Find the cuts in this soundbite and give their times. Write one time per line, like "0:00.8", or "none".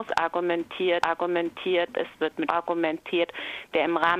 0:01.0
0:02.5